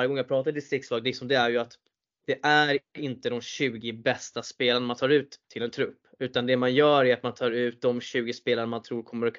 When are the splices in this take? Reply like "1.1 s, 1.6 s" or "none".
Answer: none